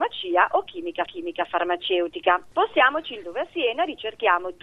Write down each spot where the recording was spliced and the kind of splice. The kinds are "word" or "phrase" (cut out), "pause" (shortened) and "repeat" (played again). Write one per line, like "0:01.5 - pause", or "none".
0:01.1 - repeat
0:03.2 - word